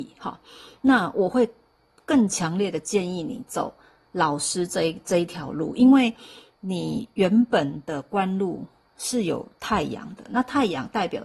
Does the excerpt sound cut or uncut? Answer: uncut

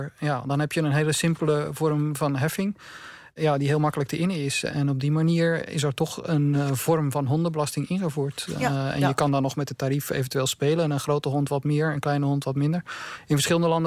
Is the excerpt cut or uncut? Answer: uncut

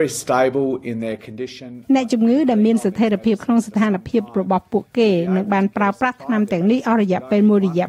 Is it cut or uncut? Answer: uncut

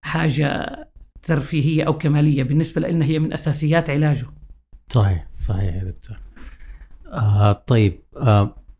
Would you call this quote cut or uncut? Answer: cut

